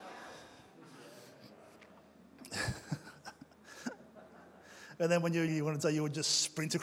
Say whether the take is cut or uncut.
cut